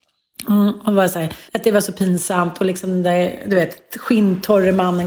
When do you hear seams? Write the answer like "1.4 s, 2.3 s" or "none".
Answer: 1.5 s